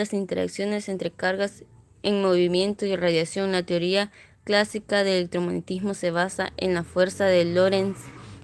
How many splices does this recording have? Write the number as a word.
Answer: zero